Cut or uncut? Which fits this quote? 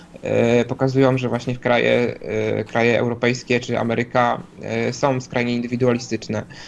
uncut